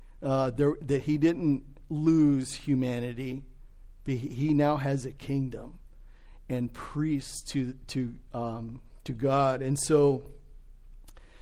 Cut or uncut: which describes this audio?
uncut